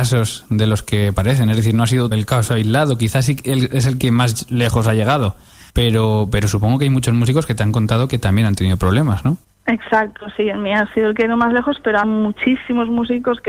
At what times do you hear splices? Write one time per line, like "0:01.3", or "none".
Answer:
0:02.1
0:05.7
0:09.4
0:12.0